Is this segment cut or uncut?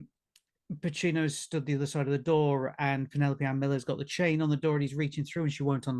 uncut